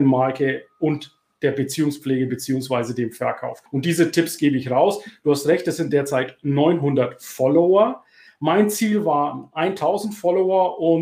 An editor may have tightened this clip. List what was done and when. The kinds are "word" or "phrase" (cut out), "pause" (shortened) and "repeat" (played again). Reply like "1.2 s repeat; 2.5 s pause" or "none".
3.7 s pause